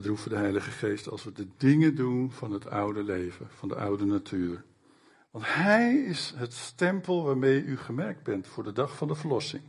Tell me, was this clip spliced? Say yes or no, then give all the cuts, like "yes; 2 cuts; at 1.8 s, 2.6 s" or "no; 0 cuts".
no; 0 cuts